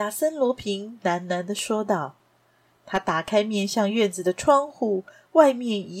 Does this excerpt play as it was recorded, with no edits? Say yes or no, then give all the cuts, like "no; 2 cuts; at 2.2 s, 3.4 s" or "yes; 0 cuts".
yes; 0 cuts